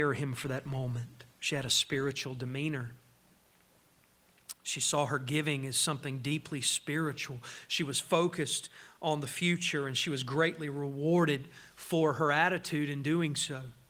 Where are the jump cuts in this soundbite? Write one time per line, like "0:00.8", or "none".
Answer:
0:01.3